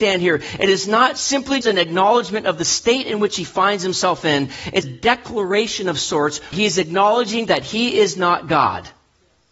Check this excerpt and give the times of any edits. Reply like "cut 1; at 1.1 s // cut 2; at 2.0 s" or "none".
cut 1; at 1.6 s // cut 2; at 4.8 s // cut 3; at 6.5 s